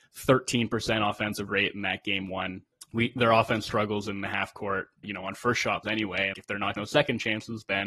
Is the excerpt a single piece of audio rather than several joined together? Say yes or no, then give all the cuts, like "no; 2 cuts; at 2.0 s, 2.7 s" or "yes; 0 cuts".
no; 6 cuts; at 1.5 s, 3.2 s, 5.0 s, 5.8 s, 6.3 s, 6.8 s